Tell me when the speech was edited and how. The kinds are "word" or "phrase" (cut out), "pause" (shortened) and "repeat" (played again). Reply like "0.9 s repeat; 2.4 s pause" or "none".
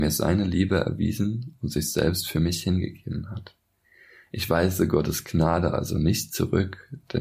none